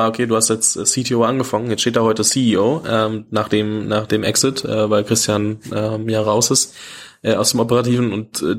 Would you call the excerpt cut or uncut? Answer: uncut